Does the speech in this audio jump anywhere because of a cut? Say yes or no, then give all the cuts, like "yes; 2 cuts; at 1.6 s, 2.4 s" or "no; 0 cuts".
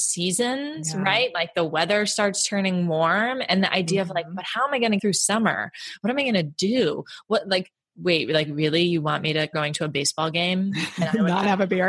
yes; 2 cuts; at 5.0 s, 9.5 s